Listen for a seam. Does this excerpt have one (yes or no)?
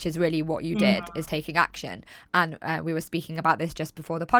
no